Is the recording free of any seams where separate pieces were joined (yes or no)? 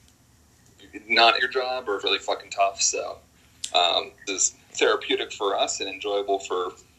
no